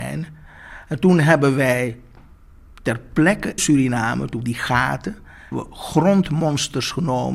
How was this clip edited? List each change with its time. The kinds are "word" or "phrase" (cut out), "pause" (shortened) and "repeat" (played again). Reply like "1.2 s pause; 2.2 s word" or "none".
3.6 s word; 4.4 s phrase; 5.5 s word